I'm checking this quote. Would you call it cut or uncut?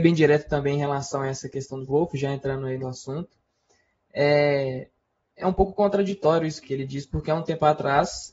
cut